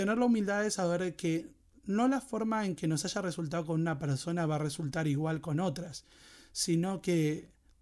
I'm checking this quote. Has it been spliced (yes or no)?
no